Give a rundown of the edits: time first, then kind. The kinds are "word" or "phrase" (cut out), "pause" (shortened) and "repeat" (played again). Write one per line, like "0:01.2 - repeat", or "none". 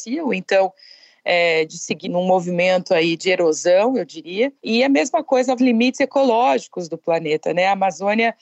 0:02.0 - word
0:03.2 - word
0:04.6 - pause
0:05.6 - phrase